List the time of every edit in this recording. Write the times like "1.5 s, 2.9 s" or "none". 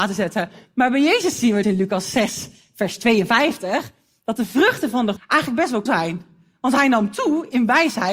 1.6 s, 5.2 s, 5.9 s